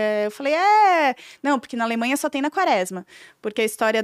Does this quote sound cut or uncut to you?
uncut